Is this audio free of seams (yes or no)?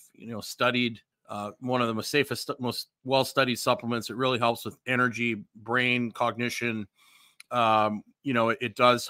no